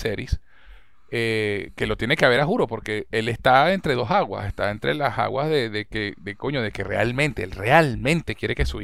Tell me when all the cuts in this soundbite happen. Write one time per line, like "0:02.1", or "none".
none